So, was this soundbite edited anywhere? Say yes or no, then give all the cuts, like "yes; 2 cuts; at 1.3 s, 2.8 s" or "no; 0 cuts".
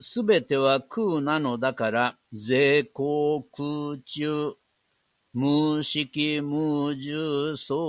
yes; 1 cut; at 2.2 s